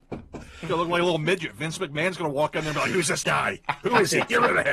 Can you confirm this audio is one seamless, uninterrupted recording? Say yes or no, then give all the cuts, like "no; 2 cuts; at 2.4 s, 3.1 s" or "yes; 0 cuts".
no; 1 cut; at 3.2 s